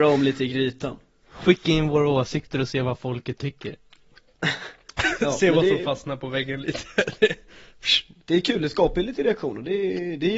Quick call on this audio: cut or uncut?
uncut